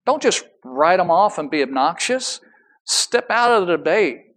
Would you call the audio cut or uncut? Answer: uncut